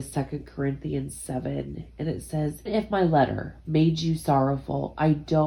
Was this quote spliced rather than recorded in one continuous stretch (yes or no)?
yes